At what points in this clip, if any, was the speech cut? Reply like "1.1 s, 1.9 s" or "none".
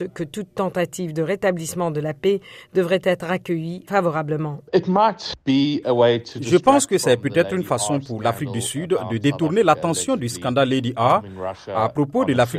4.7 s

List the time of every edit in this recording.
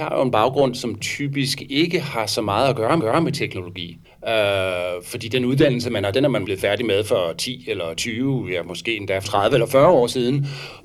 3.0 s, 4.0 s, 6.1 s, 6.4 s, 9.2 s

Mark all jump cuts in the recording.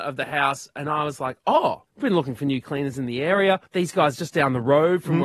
1.9 s, 3.7 s

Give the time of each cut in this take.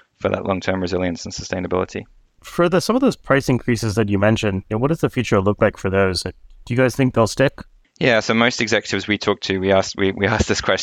none

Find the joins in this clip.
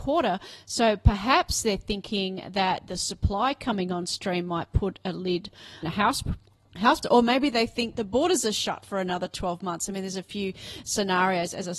5.8 s, 7.0 s, 7.9 s

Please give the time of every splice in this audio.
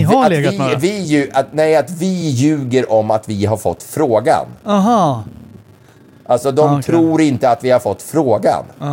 none

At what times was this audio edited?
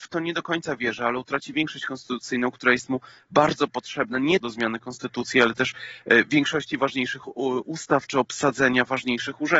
4.4 s

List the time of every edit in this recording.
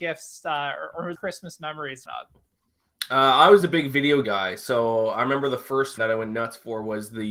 1.1 s, 2.0 s, 3.6 s, 4.2 s, 6.0 s

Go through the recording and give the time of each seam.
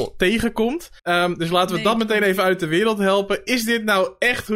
1.0 s

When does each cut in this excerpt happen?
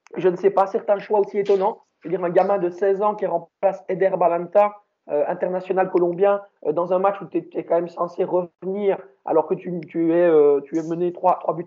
none

